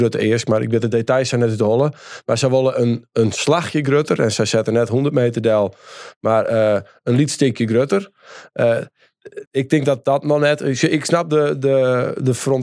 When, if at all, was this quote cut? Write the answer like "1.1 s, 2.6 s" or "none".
9.5 s